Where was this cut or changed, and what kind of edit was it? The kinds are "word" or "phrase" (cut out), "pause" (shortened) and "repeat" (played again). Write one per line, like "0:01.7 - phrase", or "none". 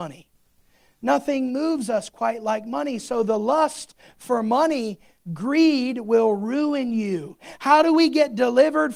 none